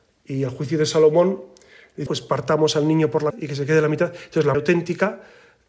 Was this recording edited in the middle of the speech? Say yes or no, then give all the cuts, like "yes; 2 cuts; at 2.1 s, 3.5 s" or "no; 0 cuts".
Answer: yes; 3 cuts; at 2.1 s, 3.3 s, 4.5 s